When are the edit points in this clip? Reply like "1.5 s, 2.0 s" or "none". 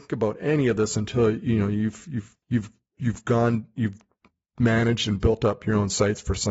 2.4 s, 4.3 s